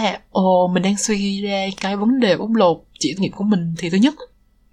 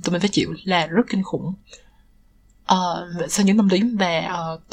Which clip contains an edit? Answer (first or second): first